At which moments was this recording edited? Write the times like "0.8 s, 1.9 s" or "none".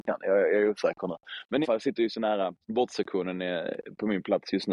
1.6 s, 2.6 s